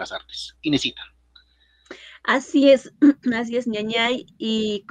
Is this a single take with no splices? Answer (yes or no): yes